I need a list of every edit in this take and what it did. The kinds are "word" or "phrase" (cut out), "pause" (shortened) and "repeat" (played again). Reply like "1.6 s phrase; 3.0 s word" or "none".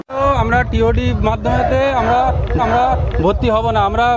2.6 s repeat